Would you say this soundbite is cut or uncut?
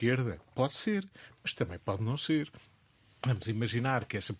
uncut